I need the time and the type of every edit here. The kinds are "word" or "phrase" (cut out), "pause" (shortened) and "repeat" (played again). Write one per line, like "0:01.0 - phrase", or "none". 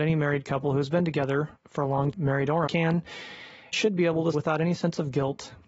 0:01.6 - pause
0:02.1 - word
0:02.7 - word
0:03.7 - word
0:04.3 - word